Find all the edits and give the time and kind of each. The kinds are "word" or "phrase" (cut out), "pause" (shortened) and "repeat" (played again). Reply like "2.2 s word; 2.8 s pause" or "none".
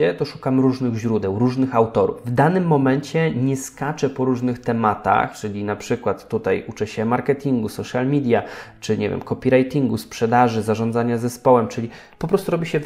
none

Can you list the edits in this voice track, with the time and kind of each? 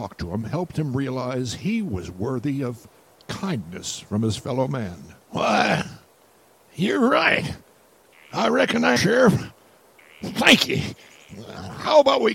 9.0 s phrase

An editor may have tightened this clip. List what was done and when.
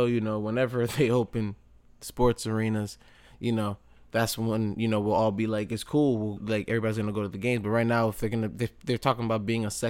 6.4 s word

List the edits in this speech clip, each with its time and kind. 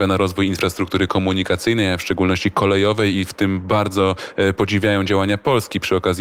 none

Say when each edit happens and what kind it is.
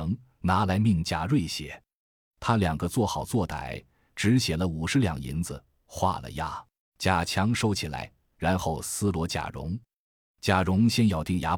6.8 s pause

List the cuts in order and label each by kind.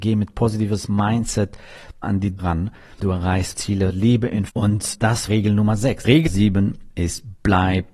2.0 s word; 2.4 s word; 3.0 s word; 3.5 s word; 4.5 s word; 5.3 s word; 6.3 s word

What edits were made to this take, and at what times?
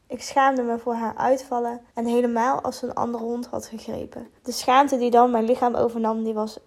1.9 s pause; 4.4 s pause

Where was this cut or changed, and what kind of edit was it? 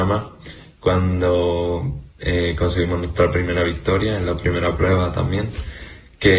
none

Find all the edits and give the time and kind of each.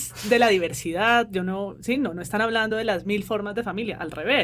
none

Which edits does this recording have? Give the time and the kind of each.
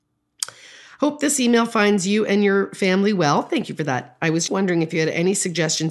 4.5 s word

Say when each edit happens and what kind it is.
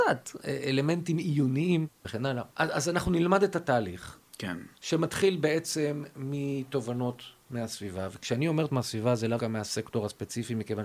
2.0 s phrase; 2.5 s pause; 4.7 s pause; 8.7 s word; 9.4 s word

